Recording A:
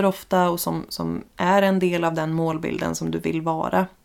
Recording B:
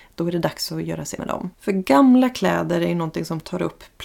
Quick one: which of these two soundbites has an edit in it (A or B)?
B